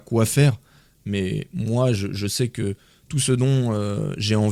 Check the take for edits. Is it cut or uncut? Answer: uncut